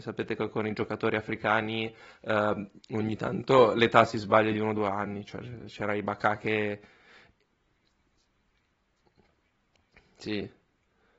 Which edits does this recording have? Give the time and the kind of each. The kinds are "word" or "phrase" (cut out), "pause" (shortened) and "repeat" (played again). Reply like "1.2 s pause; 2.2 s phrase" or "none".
none

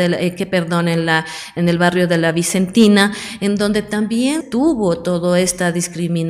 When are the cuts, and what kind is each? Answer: 4.4 s word

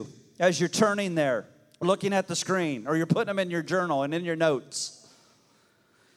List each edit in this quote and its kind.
1.8 s word

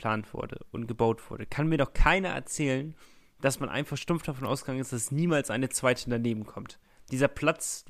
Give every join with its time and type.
none

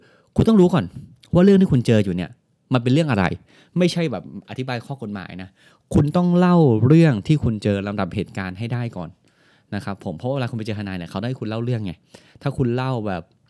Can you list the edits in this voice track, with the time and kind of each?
none

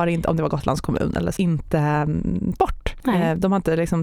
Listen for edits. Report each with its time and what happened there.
1.4 s word; 2.6 s word

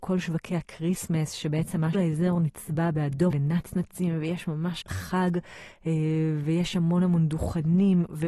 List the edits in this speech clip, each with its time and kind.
1.9 s phrase; 3.3 s word; 4.8 s word

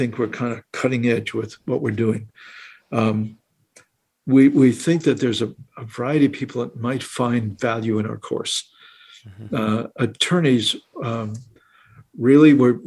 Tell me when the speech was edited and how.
none

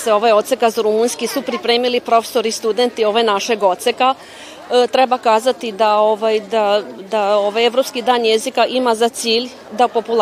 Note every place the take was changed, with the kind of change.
none

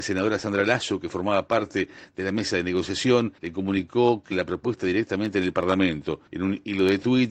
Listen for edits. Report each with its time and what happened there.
3.4 s pause; 4.3 s word; 6.3 s pause

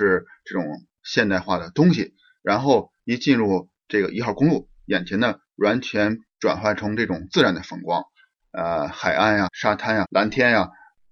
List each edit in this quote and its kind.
9.5 s word; 10.0 s word

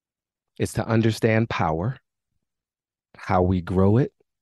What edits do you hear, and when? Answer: none

